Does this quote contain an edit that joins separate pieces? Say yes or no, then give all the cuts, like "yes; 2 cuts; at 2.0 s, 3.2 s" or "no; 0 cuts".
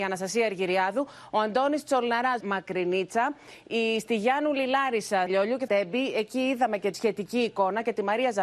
yes; 4 cuts; at 2.4 s, 5.3 s, 5.7 s, 6.9 s